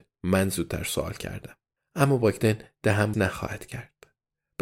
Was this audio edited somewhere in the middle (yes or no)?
yes